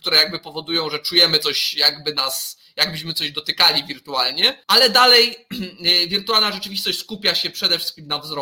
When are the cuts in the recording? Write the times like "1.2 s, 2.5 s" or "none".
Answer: 4.6 s